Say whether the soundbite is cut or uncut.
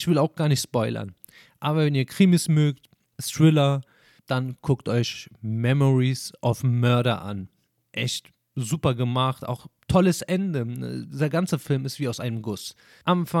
uncut